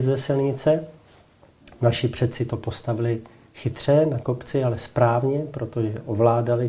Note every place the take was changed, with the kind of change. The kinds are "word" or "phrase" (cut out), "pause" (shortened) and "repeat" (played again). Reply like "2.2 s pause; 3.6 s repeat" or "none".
none